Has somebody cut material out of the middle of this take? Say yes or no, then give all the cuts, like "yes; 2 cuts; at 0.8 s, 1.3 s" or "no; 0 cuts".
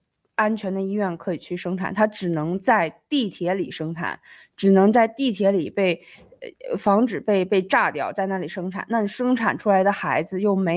no; 0 cuts